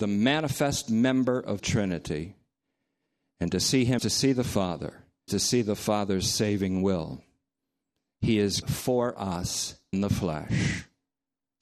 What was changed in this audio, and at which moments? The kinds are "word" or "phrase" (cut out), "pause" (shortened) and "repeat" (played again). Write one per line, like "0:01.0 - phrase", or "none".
0:01.6 - word
0:04.0 - word
0:05.3 - word
0:08.6 - word
0:09.9 - word